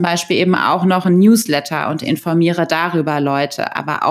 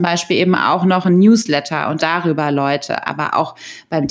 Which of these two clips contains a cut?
second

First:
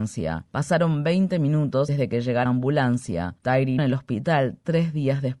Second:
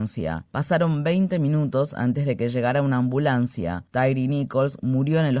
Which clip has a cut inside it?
first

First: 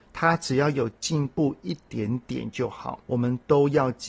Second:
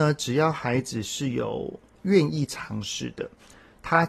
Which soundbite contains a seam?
first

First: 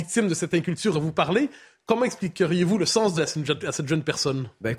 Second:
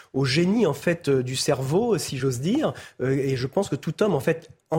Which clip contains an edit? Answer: first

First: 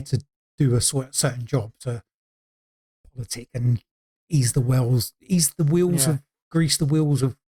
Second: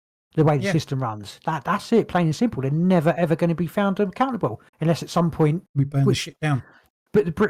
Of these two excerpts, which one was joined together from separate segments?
second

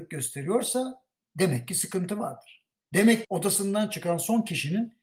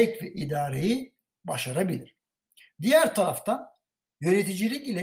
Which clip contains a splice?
first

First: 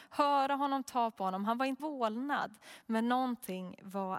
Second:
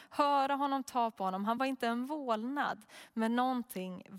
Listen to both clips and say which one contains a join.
first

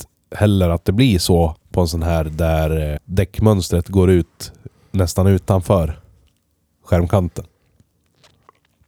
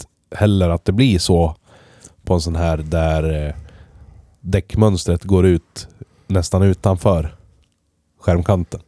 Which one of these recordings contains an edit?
first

